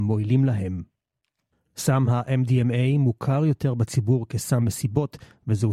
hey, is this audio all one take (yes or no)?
yes